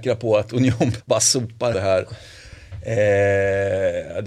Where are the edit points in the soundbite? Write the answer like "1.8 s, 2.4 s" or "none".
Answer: 1.0 s, 1.7 s